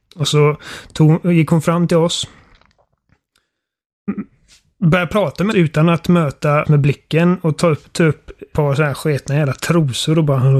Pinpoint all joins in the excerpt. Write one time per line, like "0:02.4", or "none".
0:05.5
0:06.6
0:08.5